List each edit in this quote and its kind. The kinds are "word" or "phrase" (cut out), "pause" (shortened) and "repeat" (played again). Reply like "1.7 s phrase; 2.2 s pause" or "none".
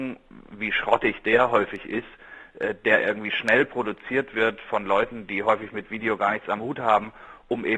none